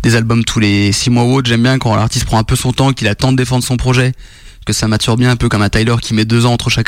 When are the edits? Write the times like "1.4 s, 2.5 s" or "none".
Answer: none